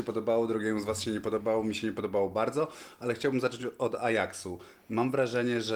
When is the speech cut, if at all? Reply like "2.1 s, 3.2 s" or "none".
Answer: none

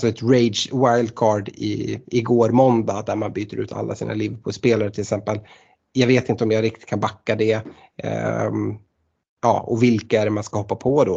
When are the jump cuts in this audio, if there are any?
none

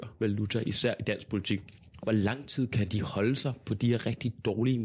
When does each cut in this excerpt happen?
none

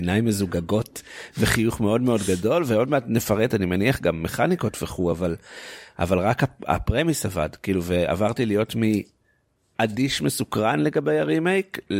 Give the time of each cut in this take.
none

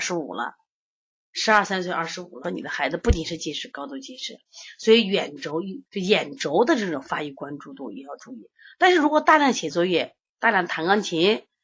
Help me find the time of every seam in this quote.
2.4 s, 5.9 s

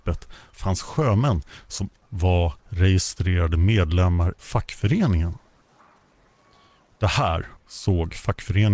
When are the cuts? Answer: 2.0 s, 2.6 s, 4.4 s, 7.6 s

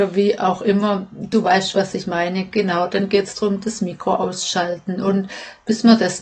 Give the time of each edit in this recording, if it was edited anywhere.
none

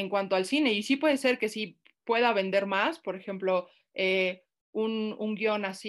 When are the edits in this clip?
none

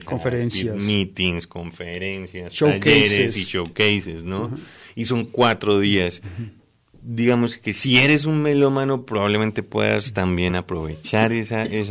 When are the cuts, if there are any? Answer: none

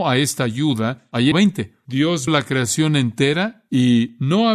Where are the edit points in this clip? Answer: 1.3 s, 2.3 s

